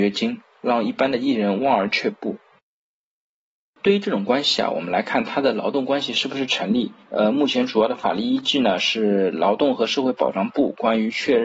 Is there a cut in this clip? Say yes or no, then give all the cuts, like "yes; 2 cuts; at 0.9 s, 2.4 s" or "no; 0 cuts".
yes; 1 cut; at 7.0 s